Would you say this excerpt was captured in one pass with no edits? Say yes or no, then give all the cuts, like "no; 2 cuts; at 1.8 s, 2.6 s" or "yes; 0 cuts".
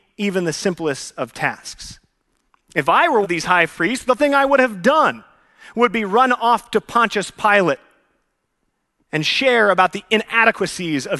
no; 2 cuts; at 3.2 s, 4.2 s